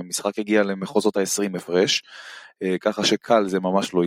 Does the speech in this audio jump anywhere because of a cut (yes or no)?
no